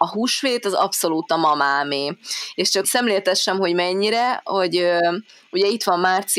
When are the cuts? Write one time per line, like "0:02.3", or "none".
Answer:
0:02.8

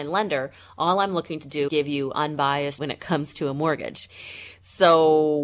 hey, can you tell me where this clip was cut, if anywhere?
0:01.7
0:02.8

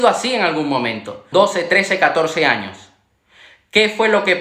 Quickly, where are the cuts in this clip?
0:01.3

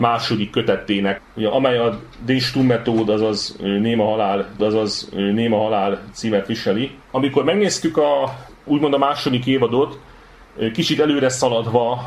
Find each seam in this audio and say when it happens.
0:01.2
0:04.6
0:07.0

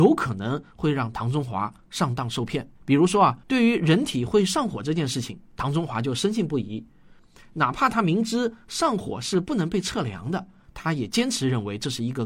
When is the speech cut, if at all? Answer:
0:02.8
0:03.4

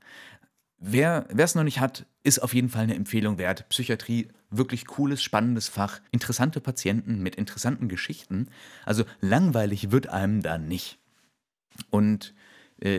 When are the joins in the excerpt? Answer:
0:06.1

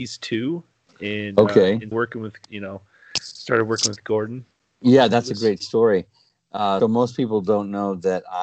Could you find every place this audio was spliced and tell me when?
0:01.9
0:02.4
0:06.8

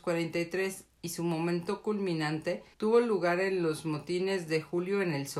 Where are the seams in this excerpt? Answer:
0:02.7

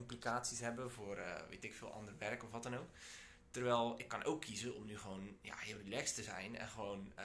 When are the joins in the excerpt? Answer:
none

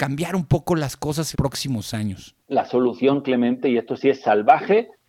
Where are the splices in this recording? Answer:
0:01.3
0:02.4

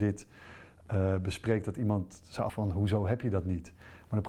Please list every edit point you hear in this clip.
0:02.5

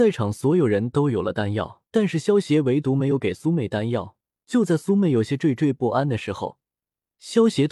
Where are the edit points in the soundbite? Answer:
0:01.9
0:04.4

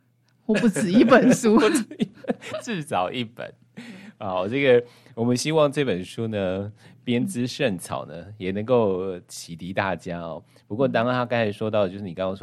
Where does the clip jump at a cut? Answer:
0:02.5

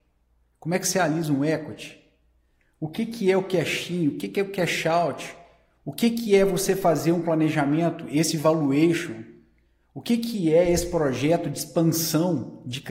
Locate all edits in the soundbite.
none

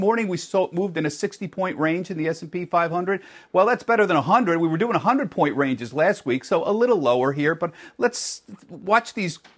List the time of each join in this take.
none

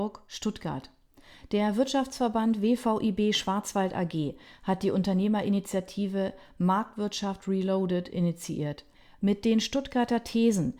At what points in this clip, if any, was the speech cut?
none

